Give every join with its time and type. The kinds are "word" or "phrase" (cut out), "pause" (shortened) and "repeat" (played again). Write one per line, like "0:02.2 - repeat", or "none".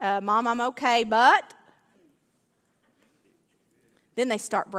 0:01.9 - pause